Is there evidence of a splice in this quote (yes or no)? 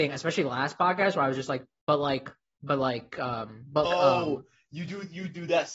yes